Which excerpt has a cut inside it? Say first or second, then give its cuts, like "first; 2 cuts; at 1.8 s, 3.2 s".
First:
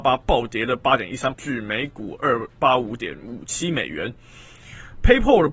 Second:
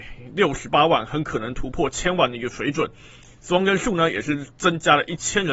first; 1 cut; at 1.3 s